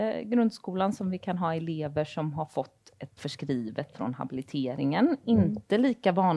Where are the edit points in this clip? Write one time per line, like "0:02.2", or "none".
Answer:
0:03.2